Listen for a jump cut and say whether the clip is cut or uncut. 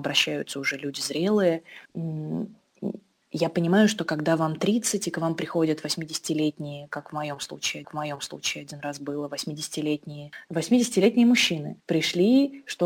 cut